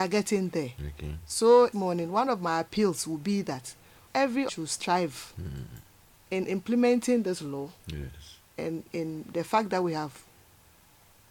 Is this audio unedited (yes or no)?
no